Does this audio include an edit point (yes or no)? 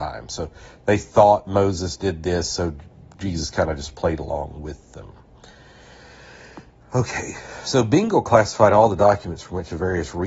no